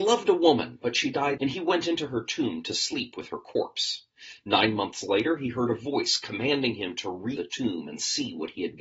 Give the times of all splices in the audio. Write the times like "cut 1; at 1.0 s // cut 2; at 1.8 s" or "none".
cut 1; at 1.4 s // cut 2; at 7.4 s

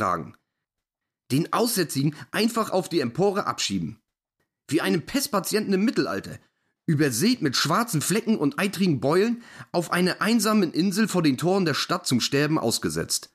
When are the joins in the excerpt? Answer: none

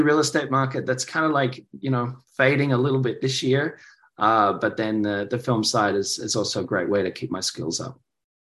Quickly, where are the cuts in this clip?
none

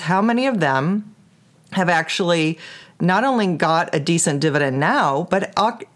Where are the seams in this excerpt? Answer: none

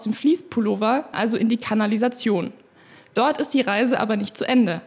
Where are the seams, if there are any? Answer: cut 1; at 1.1 s

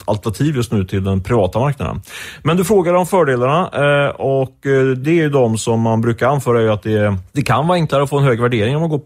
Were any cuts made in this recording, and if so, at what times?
cut 1; at 7.3 s

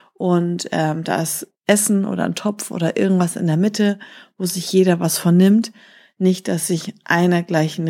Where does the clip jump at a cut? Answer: none

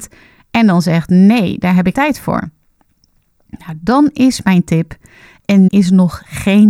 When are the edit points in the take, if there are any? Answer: cut 1; at 1.9 s // cut 2; at 5.7 s

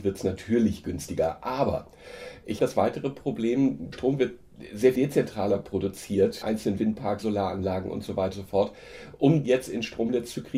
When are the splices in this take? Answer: cut 1; at 2.6 s // cut 2; at 3.9 s // cut 3; at 4.9 s // cut 4; at 6.4 s // cut 5; at 7.2 s // cut 6; at 8.3 s // cut 7; at 9.4 s

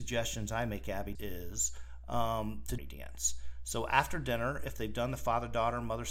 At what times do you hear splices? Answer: cut 1; at 1.1 s // cut 2; at 2.8 s

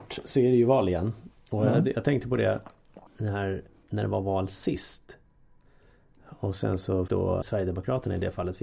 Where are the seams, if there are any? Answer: cut 1; at 3.1 s // cut 2; at 7.1 s // cut 3; at 7.4 s

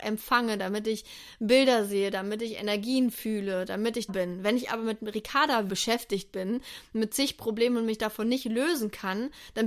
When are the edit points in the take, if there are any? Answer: cut 1; at 4.1 s // cut 2; at 5.7 s

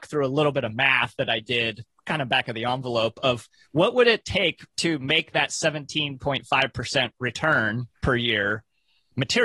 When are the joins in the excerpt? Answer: cut 1; at 4.7 s // cut 2; at 7.9 s

